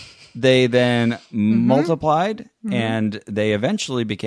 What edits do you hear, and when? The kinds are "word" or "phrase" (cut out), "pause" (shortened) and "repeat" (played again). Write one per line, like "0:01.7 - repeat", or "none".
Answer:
0:01.3 - pause